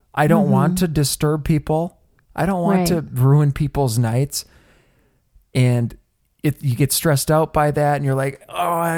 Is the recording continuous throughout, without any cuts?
yes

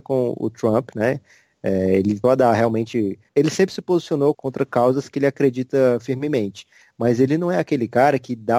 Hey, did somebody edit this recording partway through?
yes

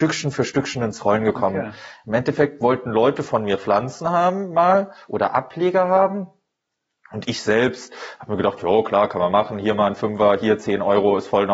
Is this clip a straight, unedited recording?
yes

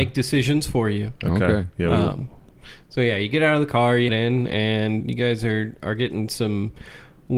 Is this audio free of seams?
no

